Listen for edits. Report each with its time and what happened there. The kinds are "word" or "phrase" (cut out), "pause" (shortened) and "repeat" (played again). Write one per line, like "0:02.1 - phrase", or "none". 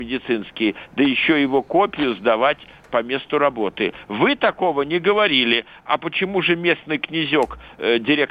none